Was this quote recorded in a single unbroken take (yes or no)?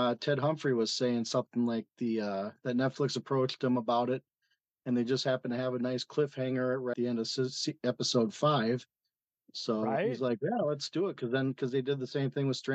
no